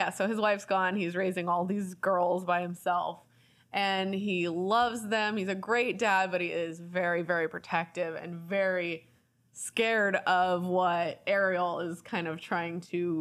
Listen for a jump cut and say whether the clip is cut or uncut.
uncut